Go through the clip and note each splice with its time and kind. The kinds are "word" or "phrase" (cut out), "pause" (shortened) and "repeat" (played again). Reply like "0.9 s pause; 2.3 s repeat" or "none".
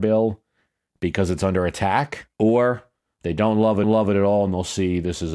2.3 s pause; 3.8 s repeat